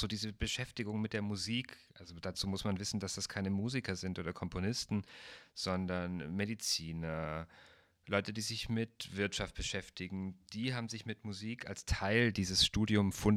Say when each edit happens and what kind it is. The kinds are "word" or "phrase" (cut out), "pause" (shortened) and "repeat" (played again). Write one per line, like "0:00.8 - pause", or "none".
none